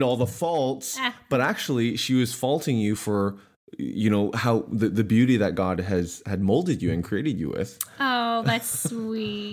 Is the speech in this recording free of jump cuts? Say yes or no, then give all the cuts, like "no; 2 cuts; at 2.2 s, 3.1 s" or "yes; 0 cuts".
yes; 0 cuts